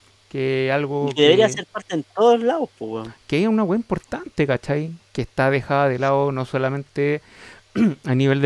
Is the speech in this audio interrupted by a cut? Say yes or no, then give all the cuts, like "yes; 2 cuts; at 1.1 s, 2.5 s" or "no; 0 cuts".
no; 0 cuts